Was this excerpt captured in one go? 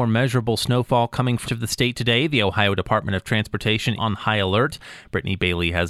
no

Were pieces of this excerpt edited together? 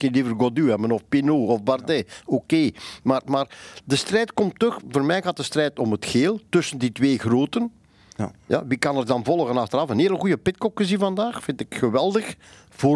no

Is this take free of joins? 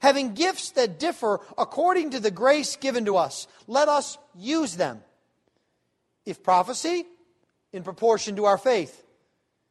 yes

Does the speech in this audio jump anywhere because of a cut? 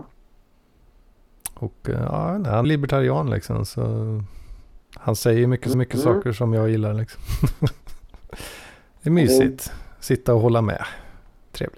yes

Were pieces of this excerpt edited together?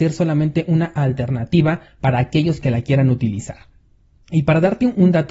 no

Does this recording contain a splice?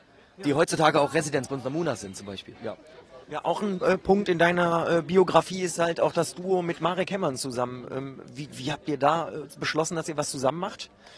yes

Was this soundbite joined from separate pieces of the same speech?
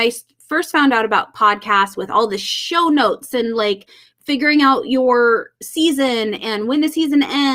no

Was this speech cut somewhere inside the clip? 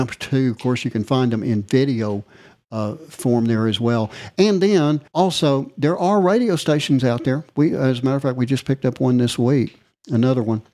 yes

